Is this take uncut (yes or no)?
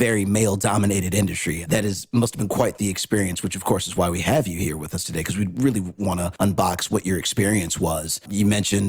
yes